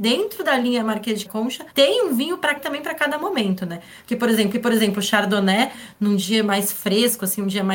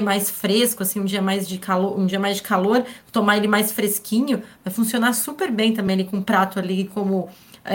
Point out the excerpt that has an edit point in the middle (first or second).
first